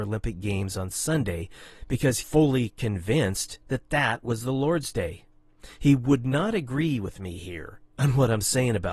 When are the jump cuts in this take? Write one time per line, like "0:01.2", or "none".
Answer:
0:02.2
0:03.6